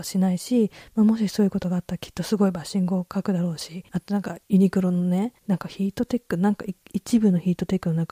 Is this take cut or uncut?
cut